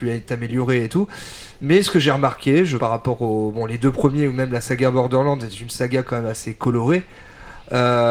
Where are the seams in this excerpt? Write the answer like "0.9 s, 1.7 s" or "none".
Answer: 2.8 s